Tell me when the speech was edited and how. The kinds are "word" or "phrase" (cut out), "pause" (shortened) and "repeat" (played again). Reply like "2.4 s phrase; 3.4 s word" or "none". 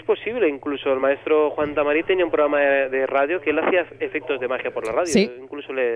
none